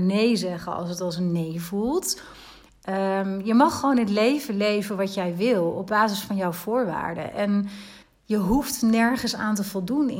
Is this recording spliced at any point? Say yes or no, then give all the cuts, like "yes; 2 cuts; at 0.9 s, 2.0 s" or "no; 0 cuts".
yes; 1 cut; at 8.0 s